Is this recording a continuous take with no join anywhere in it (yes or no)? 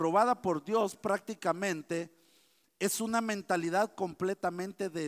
yes